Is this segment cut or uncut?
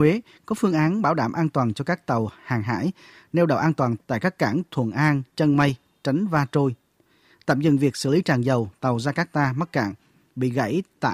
uncut